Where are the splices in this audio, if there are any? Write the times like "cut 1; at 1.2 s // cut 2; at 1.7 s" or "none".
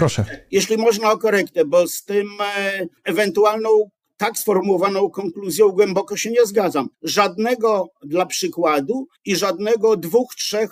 cut 1; at 3.0 s // cut 2; at 6.9 s // cut 3; at 9.2 s